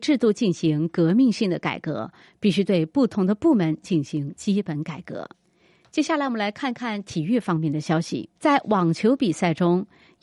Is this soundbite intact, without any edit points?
no; 2 cuts; at 5.3 s, 8.4 s

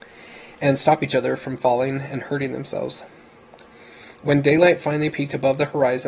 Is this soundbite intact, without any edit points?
yes; 0 cuts

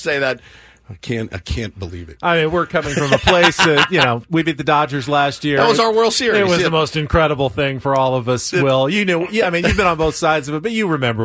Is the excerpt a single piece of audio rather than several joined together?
yes; 0 cuts

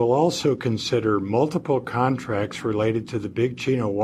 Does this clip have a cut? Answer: no; 0 cuts

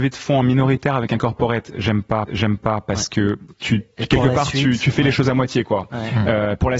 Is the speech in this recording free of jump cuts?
no; 1 cut; at 2.3 s

